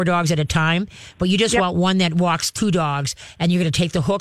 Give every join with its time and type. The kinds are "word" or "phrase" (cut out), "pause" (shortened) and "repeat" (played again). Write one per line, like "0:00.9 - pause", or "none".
none